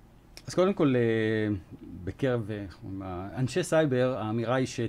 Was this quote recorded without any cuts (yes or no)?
yes